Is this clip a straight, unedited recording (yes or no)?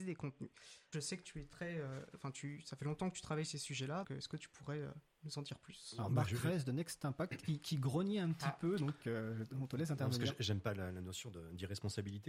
no